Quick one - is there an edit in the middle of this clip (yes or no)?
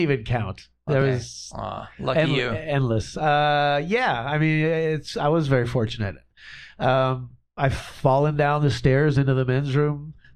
no